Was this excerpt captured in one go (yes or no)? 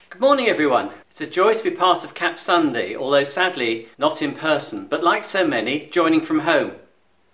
no